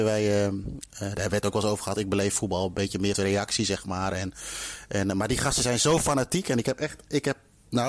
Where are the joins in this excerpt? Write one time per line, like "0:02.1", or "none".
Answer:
0:03.1